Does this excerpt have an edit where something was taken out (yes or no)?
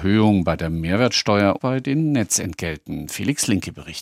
yes